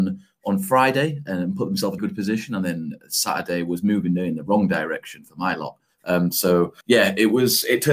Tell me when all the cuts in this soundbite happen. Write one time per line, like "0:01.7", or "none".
0:02.0
0:06.8